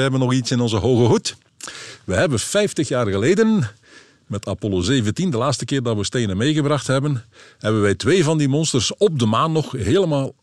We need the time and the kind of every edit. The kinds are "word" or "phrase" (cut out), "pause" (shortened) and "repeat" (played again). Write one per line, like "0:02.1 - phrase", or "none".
none

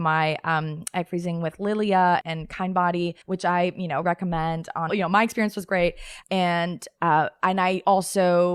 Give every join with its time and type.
0:02.2 - word
0:03.2 - pause
0:04.0 - word
0:04.9 - phrase
0:06.2 - word

